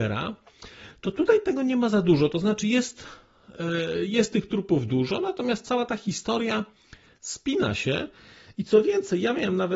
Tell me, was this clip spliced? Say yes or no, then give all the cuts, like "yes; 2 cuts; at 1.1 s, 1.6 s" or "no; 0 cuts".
no; 0 cuts